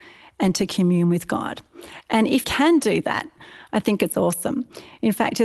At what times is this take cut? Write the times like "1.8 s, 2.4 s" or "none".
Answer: 2.4 s